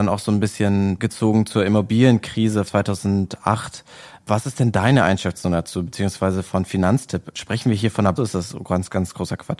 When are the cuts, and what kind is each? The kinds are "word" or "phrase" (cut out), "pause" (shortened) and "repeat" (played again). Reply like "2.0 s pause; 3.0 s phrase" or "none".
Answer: 1.0 s word; 2.7 s word; 8.2 s word